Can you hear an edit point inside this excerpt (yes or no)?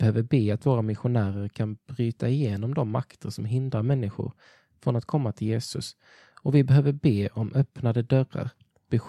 no